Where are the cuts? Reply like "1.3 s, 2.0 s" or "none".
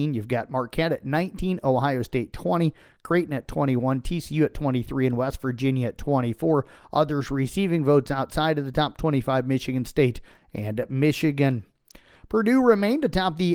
none